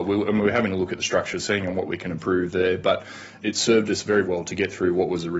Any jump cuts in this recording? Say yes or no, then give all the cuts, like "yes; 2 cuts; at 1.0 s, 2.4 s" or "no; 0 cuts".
yes; 2 cuts; at 3.4 s, 4.2 s